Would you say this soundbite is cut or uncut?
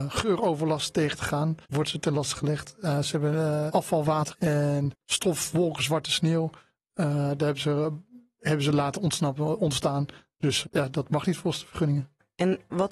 cut